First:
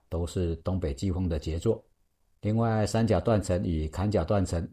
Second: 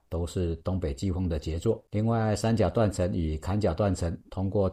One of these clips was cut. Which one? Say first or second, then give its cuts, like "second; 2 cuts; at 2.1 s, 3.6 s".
second; 1 cut; at 1.9 s